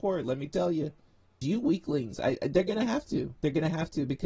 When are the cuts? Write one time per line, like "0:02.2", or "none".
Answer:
0:01.4